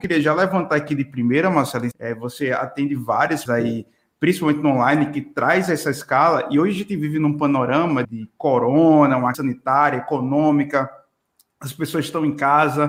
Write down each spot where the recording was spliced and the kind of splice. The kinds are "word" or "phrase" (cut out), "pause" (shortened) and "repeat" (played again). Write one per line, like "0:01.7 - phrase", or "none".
0:01.9 - phrase
0:03.5 - word
0:08.0 - word
0:09.3 - word